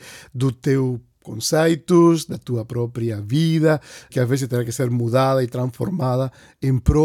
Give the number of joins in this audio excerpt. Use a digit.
1